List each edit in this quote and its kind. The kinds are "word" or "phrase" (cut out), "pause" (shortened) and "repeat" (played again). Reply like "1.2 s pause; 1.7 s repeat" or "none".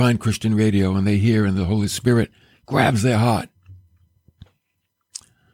none

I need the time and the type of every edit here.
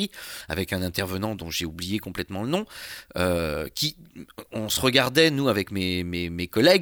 none

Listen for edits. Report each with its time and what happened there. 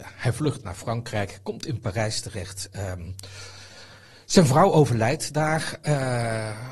none

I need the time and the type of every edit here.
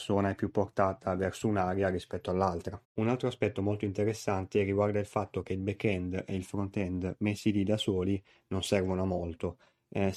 2.8 s pause

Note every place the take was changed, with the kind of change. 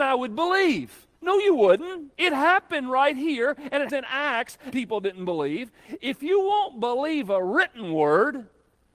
1.1 s pause; 2.1 s pause; 3.9 s word; 4.7 s word

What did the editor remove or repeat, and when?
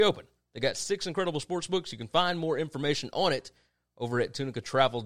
none

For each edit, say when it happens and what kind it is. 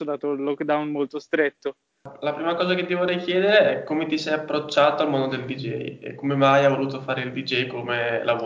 none

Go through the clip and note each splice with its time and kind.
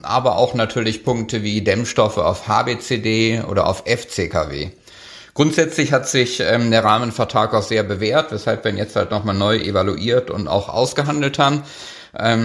none

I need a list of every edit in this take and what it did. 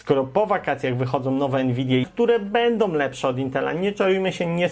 2.0 s word

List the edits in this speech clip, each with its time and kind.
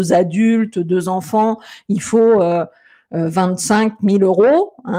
none

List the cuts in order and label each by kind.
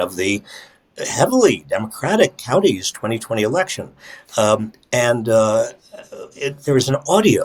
none

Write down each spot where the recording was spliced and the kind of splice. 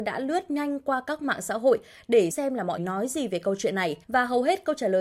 2.3 s word; 2.8 s word; 4.0 s pause

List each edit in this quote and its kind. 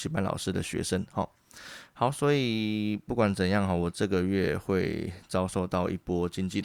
none

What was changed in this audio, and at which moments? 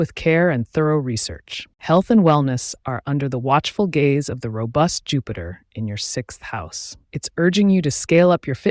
1.7 s pause; 7.0 s pause

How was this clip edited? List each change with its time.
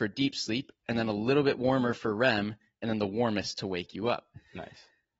none

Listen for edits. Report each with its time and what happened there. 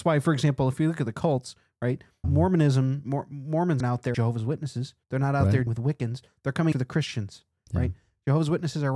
2.2 s word; 3.8 s word; 4.1 s word; 5.0 s pause; 5.7 s word; 6.7 s word

